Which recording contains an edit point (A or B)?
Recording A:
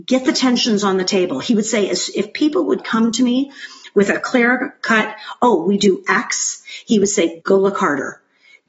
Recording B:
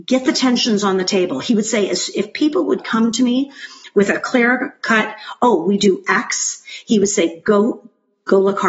A